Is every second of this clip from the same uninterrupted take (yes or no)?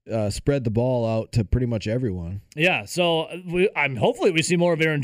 yes